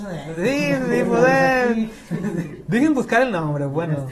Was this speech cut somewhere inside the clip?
no; 0 cuts

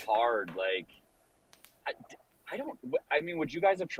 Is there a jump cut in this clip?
no; 0 cuts

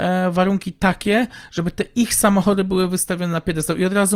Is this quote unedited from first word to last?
yes; 0 cuts

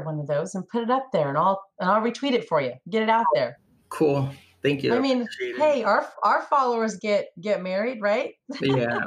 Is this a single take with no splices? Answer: yes; 0 cuts

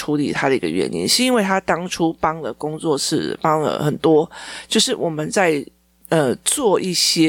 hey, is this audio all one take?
yes; 0 cuts

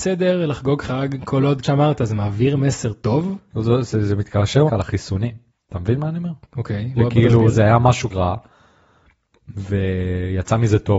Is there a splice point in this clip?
yes; 6 cuts; at 1.6 s, 3.5 s, 4.7 s, 5.5 s, 7.0 s, 8.1 s

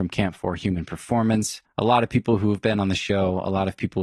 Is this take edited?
yes; 1 cut; at 1.6 s

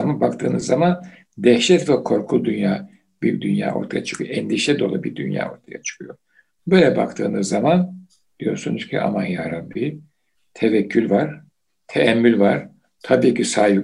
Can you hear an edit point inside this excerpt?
no; 0 cuts

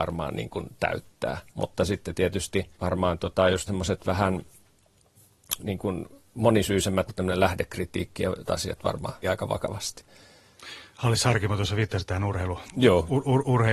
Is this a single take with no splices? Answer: no; 7 cuts; at 1.5 s, 2.7 s, 3.7 s, 5.6 s, 7.1 s, 8.5 s, 9.2 s

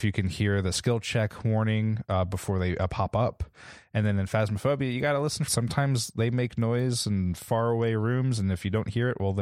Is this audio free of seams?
no; 1 cut; at 5.5 s

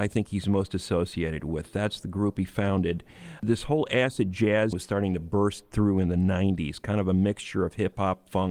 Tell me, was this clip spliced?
yes; 1 cut; at 4.7 s

